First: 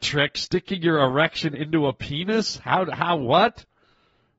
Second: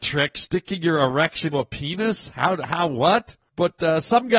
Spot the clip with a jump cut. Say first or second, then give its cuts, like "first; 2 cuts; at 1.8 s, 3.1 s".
second; 2 cuts; at 1.5 s, 3.5 s